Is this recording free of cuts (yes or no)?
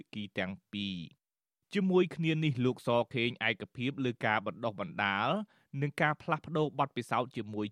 yes